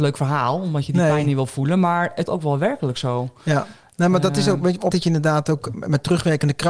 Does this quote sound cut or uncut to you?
cut